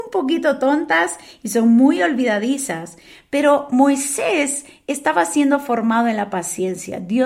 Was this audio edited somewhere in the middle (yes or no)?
no